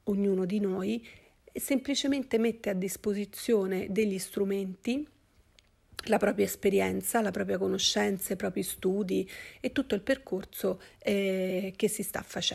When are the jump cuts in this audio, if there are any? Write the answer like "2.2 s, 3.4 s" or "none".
none